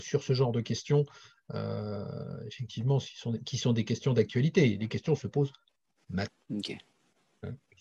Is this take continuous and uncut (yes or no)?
yes